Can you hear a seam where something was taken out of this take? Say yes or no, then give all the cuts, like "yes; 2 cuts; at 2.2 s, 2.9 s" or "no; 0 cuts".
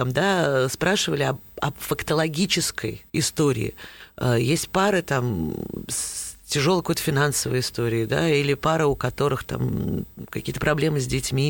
yes; 1 cut; at 3.1 s